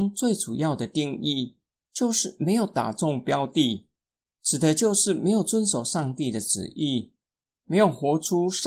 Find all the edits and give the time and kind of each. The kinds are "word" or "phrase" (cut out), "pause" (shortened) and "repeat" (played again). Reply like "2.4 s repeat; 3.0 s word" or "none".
none

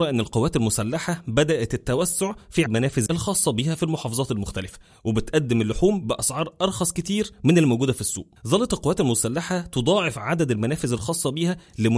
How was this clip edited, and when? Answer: 2.7 s word; 3.1 s word

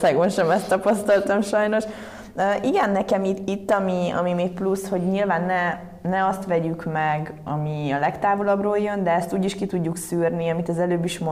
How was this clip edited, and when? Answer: none

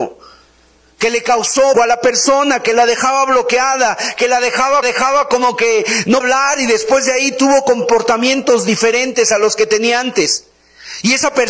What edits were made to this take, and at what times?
1.7 s word; 4.8 s repeat; 6.2 s word

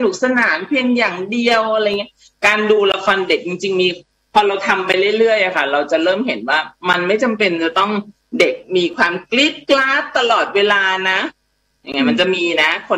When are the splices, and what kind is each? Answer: none

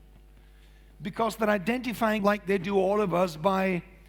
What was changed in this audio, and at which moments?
2.2 s word

